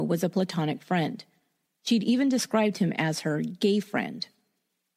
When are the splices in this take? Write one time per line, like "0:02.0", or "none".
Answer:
none